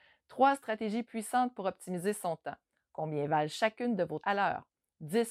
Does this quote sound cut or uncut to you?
cut